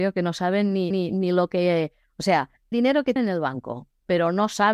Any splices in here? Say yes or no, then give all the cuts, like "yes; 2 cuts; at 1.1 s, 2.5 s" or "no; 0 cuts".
yes; 3 cuts; at 0.9 s, 2.7 s, 3.2 s